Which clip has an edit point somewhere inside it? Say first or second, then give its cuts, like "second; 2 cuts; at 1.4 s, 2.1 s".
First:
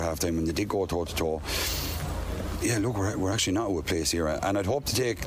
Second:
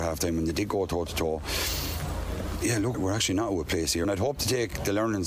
second; 2 cuts; at 2.9 s, 4.0 s